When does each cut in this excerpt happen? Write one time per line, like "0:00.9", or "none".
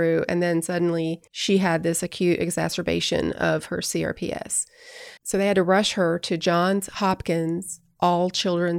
0:01.3
0:05.2